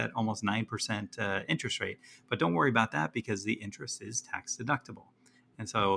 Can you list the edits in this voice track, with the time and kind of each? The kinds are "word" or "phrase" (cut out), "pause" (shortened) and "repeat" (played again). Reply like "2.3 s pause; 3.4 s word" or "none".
none